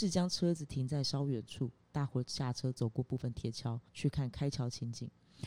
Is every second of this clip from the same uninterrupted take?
no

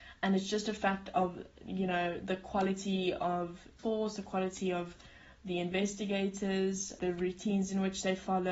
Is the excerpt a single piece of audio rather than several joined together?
no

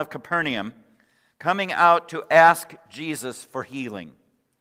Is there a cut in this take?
no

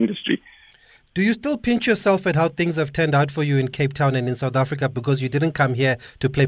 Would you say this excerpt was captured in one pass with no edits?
yes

